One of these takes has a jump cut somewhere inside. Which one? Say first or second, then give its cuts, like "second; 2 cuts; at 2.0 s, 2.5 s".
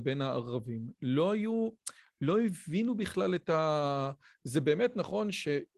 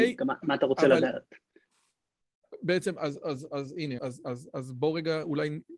second; 1 cut; at 4.0 s